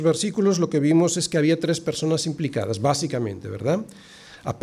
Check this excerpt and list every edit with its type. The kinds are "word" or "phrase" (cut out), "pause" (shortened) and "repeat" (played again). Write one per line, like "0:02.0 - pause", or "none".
none